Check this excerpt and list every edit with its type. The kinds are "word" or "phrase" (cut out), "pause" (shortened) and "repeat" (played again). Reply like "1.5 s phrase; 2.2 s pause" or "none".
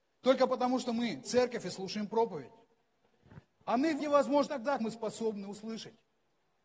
1.2 s word; 4.0 s word; 4.5 s word; 4.8 s word